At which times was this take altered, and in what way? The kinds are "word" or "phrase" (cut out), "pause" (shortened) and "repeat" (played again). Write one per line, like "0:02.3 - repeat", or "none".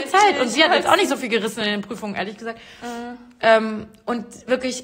none